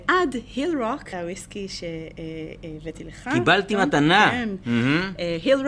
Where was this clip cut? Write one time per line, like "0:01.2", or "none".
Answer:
0:01.1